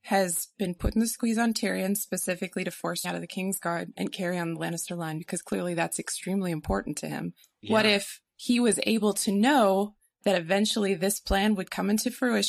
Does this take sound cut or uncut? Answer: cut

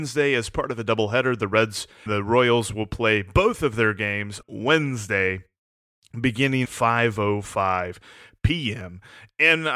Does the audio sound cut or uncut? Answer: cut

